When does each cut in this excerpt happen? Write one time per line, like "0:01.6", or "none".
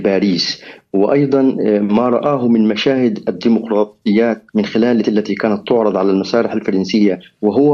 0:04.5
0:05.0